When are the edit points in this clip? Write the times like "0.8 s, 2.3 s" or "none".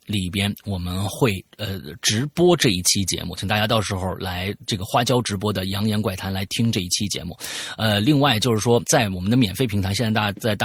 8.8 s